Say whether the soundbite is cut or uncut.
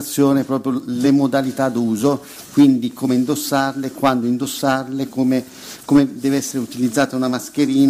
uncut